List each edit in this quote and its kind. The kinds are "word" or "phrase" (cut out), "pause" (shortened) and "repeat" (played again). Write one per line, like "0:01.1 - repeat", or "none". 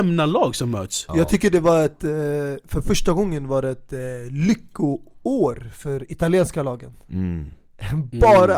none